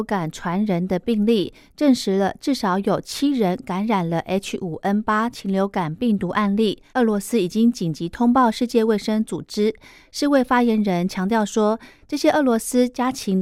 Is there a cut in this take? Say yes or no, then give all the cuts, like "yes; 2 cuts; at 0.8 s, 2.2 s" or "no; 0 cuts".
yes; 1 cut; at 6.9 s